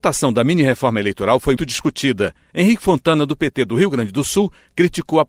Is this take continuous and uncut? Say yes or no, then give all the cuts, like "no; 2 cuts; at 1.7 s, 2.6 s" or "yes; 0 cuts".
no; 1 cut; at 1.6 s